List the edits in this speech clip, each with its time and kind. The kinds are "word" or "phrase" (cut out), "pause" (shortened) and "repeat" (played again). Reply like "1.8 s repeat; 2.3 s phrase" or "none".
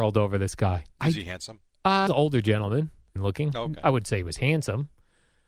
0.9 s pause; 2.1 s phrase; 3.2 s phrase